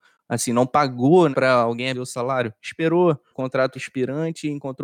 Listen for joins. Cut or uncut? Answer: cut